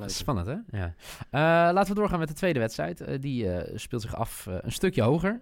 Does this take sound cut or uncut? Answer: uncut